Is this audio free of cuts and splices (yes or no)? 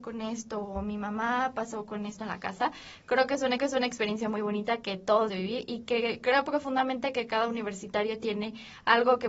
no